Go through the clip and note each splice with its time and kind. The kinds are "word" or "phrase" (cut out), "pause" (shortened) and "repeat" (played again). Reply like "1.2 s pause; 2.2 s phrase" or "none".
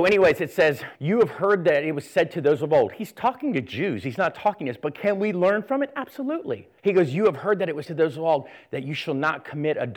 1.0 s pause; 7.9 s word

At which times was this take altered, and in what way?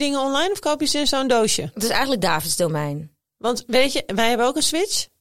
none

